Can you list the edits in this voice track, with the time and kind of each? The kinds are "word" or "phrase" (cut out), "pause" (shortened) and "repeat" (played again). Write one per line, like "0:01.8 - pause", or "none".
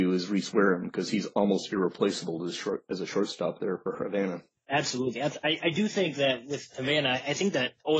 none